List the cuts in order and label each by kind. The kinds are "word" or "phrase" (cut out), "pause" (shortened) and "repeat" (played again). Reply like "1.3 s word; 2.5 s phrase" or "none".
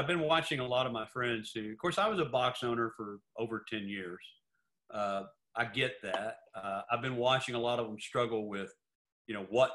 none

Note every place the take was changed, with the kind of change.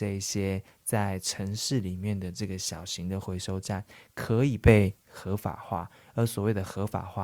none

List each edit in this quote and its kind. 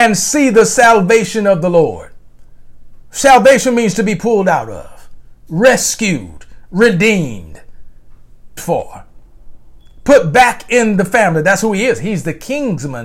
8.6 s word

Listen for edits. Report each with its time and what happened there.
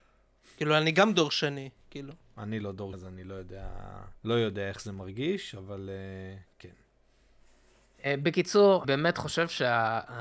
2.9 s word; 4.2 s pause; 8.8 s word

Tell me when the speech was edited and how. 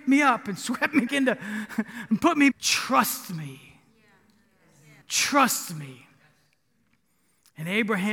1.1 s word; 2.5 s phrase; 5.0 s pause

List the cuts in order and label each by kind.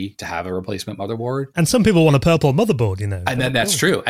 1.5 s pause

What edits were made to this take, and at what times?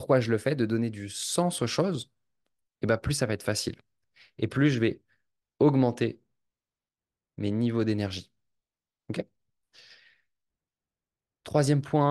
none

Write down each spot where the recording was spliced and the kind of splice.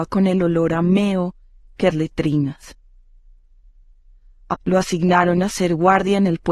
1.9 s phrase; 4.5 s word

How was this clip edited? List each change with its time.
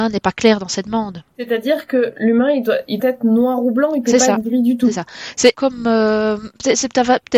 1.3 s pause; 3.0 s word; 5.5 s word

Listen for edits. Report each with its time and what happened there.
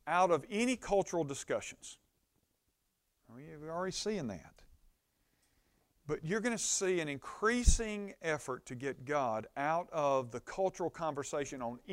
none

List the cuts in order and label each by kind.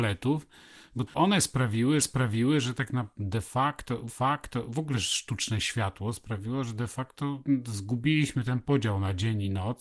1.1 s word; 2.0 s repeat; 4.1 s repeat

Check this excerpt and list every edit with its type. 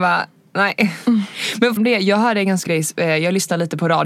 1.8 s phrase; 2.7 s word

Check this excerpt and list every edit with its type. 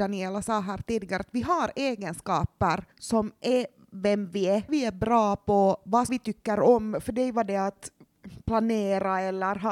2.9 s pause; 4.7 s word; 6.1 s phrase

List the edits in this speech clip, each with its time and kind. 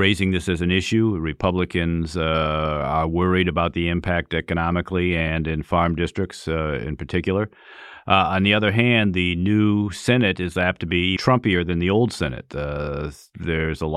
11.2 s word

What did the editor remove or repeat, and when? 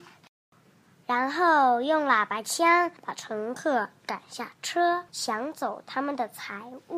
3.0 s pause; 5.1 s pause

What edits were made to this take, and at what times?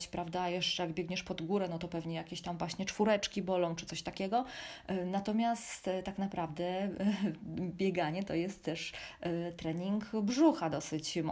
none

